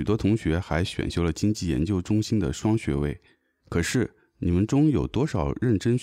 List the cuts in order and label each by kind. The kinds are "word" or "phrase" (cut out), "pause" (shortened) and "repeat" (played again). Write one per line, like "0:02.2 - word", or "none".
none